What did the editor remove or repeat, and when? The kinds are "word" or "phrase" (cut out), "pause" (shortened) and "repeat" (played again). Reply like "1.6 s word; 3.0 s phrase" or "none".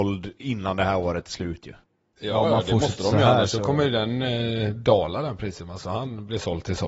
1.8 s pause